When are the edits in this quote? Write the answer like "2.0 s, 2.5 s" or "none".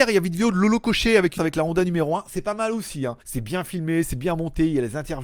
1.4 s, 3.2 s